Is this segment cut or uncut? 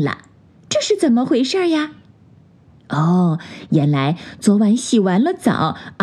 uncut